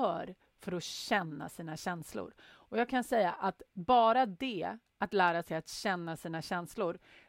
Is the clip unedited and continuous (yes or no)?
no